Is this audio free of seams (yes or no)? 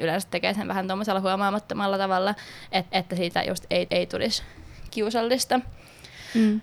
no